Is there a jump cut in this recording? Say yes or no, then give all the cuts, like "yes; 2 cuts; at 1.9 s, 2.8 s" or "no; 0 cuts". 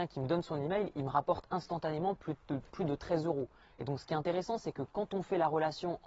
no; 0 cuts